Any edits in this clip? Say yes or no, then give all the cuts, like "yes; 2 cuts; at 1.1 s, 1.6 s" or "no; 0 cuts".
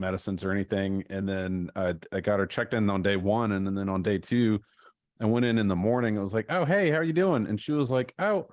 no; 0 cuts